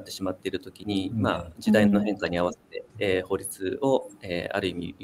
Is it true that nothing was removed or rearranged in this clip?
no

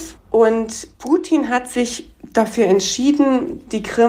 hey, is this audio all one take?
yes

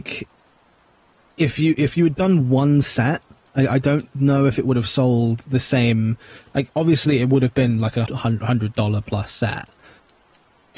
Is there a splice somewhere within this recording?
yes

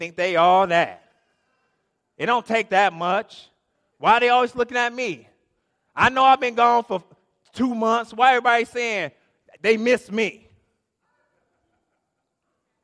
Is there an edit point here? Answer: no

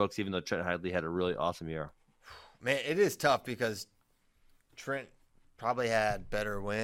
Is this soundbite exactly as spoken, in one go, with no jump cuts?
yes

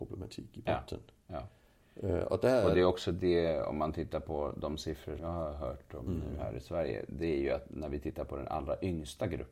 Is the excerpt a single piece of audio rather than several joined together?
no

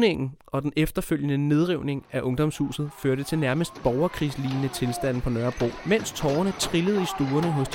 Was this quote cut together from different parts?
no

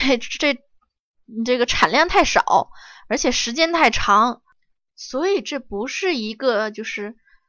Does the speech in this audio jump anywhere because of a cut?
no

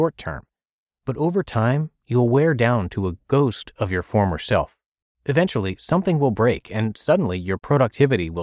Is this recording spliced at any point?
no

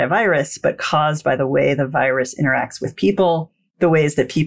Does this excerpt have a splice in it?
no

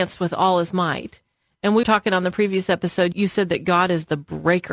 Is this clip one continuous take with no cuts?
no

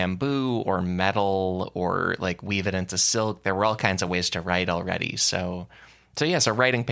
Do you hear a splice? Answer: no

